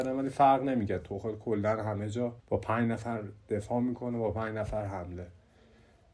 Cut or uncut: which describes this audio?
cut